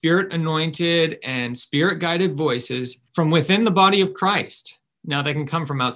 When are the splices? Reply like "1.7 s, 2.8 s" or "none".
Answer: 3.1 s